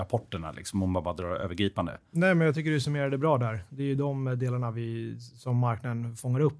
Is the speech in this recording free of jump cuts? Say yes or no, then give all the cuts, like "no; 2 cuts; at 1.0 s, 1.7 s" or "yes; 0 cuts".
yes; 0 cuts